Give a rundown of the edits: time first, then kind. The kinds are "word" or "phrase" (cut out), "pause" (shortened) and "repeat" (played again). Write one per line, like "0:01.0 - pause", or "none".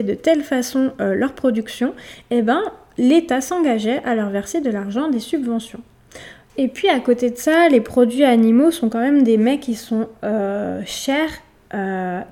none